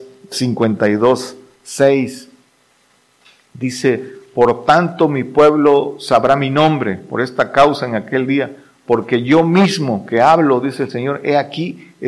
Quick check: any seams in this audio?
no; 0 cuts

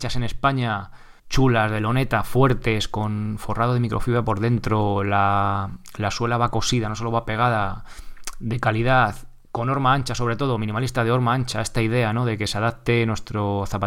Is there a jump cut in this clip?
yes; 1 cut; at 1.2 s

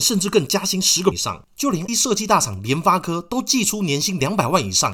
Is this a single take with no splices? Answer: no; 2 cuts; at 1.1 s, 1.9 s

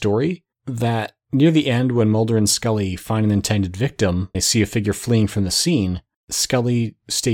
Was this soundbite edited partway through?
yes; 1 cut; at 4.3 s

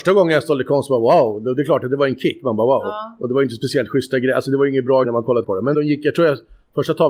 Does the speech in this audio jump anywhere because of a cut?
yes; 3 cuts; at 5.0 s, 5.4 s, 5.7 s

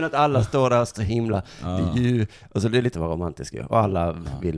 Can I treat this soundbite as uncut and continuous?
no; 2 cuts; at 0.9 s, 2.9 s

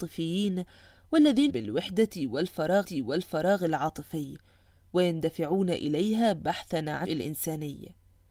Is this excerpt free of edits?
no; 3 cuts; at 1.5 s, 2.8 s, 7.0 s

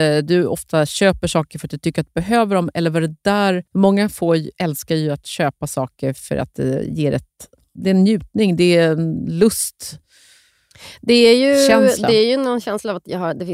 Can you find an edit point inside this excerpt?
yes; 1 cut; at 3.7 s

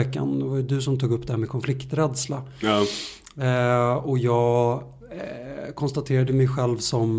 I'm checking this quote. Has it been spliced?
no; 0 cuts

